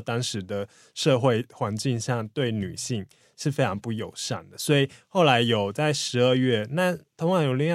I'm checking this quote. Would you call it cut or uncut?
uncut